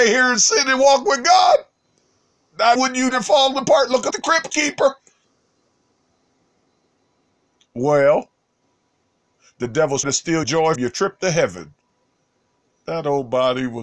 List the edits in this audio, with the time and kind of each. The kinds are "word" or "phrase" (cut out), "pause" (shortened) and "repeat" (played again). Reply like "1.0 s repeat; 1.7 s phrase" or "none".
2.8 s word; 3.1 s word; 4.1 s word; 10.0 s word; 10.4 s word; 10.8 s word